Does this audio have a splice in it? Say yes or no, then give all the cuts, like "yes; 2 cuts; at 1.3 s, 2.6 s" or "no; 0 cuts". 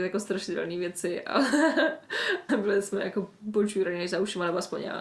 yes; 1 cut; at 2.5 s